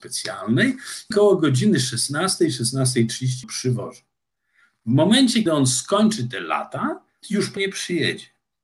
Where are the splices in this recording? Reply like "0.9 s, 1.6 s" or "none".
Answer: 1.1 s, 3.4 s, 5.5 s, 7.2 s, 7.6 s